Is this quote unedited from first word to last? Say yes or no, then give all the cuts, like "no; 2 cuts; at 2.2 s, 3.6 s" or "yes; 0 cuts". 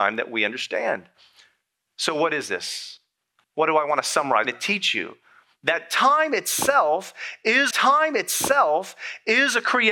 no; 2 cuts; at 4.4 s, 7.7 s